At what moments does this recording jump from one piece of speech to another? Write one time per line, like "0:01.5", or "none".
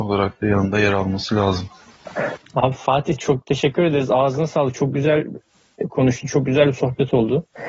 none